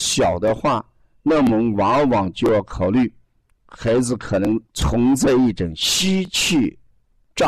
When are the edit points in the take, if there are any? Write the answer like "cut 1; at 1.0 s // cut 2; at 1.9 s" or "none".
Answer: cut 1; at 4.7 s